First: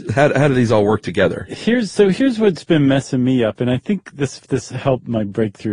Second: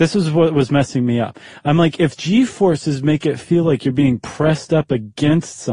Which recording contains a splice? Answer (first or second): first